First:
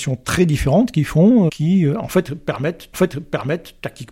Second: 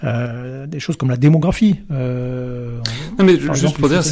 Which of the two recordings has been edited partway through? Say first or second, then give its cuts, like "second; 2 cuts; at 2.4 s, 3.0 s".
first; 2 cuts; at 1.5 s, 2.9 s